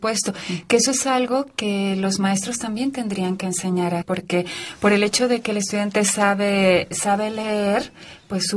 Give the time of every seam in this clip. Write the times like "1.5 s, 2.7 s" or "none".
4.0 s